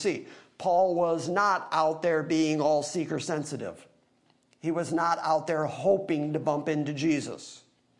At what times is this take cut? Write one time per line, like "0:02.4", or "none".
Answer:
none